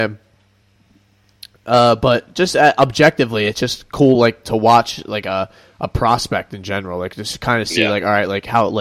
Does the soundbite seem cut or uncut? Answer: uncut